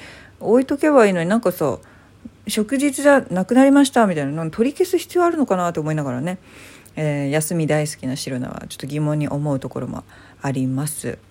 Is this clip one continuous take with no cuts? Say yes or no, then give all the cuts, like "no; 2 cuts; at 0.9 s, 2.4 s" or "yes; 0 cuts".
yes; 0 cuts